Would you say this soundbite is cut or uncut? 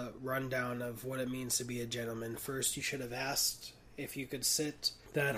uncut